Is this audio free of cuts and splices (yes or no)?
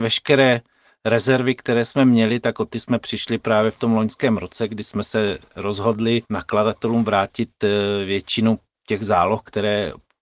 no